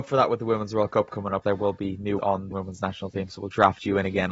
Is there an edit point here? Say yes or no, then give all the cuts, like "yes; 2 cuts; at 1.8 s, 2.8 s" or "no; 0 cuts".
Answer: yes; 3 cuts; at 1.4 s, 2.2 s, 2.5 s